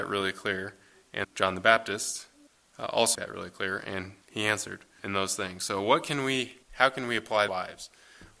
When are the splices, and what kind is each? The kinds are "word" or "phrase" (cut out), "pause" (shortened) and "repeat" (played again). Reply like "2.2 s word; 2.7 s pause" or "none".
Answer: 1.2 s word; 2.5 s pause; 3.1 s phrase; 4.2 s pause; 5.0 s word; 6.6 s pause; 7.5 s phrase